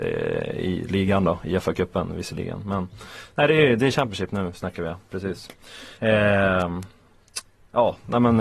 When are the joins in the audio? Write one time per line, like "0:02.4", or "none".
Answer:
0:05.9